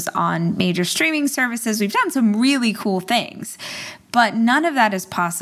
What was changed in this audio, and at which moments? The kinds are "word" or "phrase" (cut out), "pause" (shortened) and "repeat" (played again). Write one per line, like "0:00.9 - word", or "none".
none